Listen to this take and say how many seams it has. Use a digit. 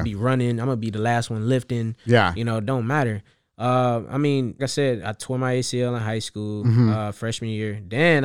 1